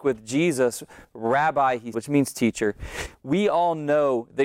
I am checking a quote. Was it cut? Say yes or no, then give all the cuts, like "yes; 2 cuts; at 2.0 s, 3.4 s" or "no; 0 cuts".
yes; 1 cut; at 1.9 s